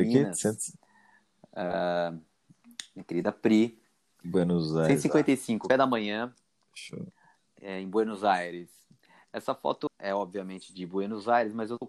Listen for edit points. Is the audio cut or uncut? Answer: cut